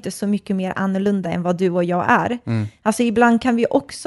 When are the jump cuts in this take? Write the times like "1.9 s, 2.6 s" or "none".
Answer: none